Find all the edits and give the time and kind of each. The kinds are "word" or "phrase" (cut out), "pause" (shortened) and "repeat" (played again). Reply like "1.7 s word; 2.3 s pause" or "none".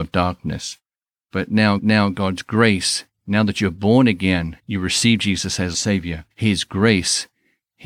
1.8 s repeat; 4.6 s pause; 5.7 s phrase; 6.3 s pause